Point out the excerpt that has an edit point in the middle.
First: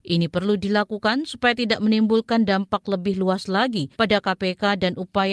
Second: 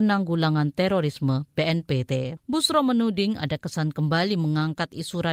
first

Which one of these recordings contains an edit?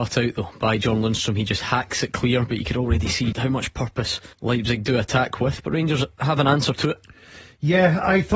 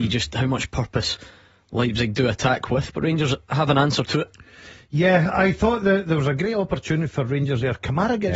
first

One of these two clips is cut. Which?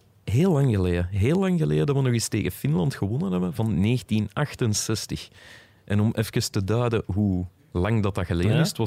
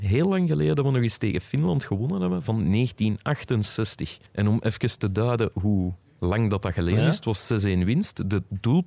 second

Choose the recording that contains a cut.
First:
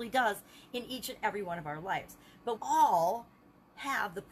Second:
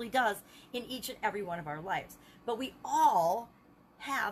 first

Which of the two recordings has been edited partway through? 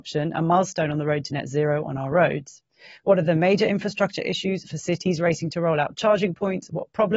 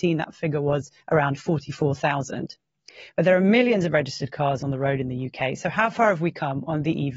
second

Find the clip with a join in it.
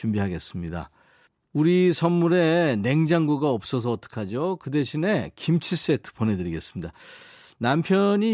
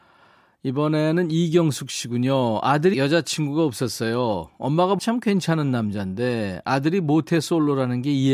second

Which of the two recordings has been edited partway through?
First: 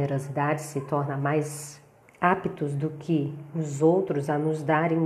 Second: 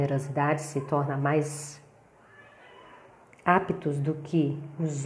first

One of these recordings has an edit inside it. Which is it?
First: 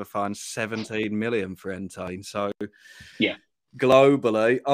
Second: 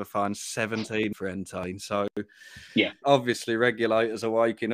second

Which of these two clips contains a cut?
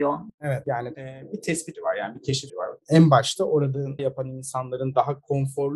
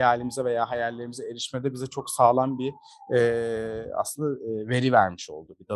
first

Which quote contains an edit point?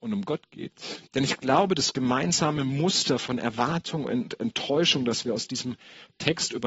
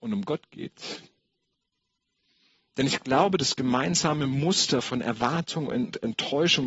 first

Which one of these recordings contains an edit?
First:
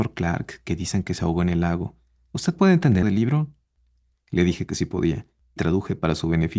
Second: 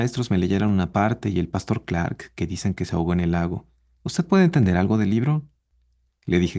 first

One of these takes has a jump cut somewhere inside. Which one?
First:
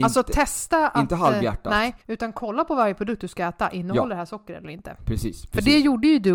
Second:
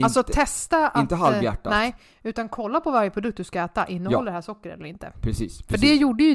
first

